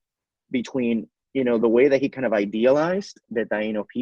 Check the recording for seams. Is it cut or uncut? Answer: uncut